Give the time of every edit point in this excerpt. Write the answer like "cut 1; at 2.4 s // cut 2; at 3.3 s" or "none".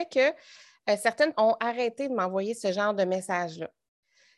cut 1; at 1.3 s